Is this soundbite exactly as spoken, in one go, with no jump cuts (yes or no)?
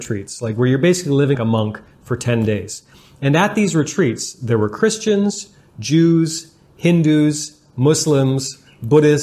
no